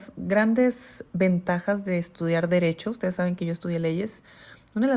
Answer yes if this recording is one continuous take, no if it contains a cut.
yes